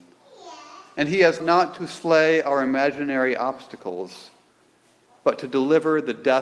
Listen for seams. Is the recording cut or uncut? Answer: cut